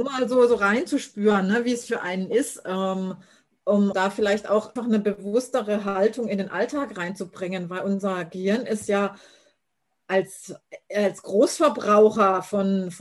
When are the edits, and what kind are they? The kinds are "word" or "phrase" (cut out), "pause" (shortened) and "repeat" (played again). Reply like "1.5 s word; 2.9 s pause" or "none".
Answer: 3.9 s word; 4.8 s word

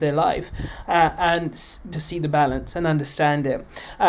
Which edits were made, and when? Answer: 1.9 s phrase

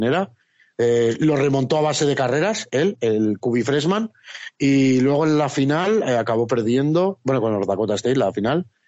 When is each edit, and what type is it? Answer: none

